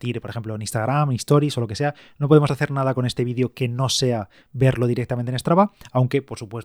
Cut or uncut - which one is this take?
uncut